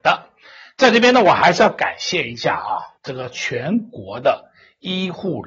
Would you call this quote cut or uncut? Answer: cut